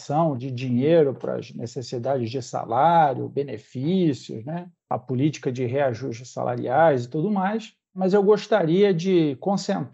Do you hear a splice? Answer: no; 0 cuts

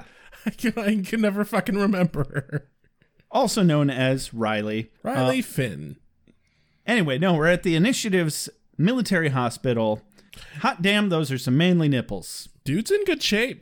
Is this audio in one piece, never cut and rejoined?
no; 1 cut; at 5.0 s

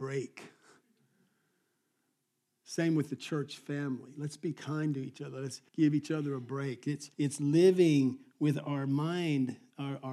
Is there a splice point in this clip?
yes; 2 cuts; at 5.7 s, 7.1 s

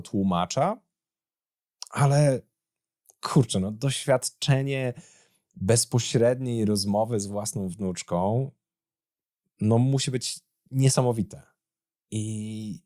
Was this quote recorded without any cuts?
yes; 0 cuts

